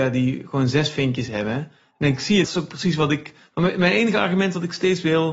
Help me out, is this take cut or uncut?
cut